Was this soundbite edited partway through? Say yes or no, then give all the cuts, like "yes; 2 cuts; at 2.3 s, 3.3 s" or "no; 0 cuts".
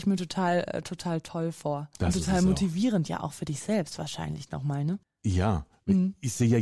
yes; 2 cuts; at 1.9 s, 5.0 s